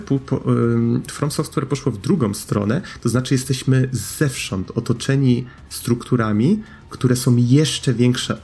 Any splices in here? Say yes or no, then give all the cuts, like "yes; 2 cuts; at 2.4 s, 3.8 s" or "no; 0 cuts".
no; 0 cuts